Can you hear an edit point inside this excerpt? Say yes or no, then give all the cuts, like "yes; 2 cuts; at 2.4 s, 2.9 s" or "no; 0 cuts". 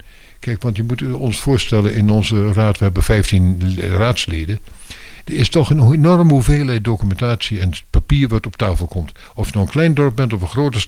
no; 0 cuts